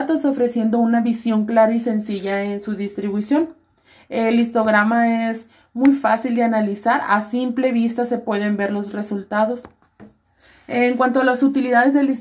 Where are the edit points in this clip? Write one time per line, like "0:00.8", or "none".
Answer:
none